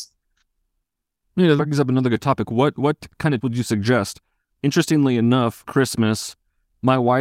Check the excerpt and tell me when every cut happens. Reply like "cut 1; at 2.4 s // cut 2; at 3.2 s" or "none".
cut 1; at 1.6 s // cut 2; at 3.4 s // cut 3; at 5.7 s